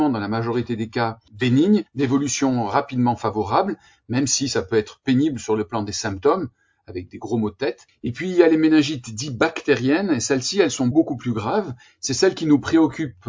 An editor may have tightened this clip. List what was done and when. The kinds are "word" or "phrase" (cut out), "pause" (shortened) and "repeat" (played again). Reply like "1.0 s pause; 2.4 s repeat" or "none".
1.9 s pause; 10.9 s word